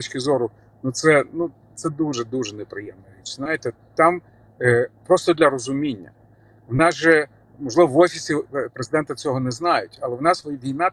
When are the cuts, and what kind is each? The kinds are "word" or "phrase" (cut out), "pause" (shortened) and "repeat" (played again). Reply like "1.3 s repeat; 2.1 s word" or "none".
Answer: none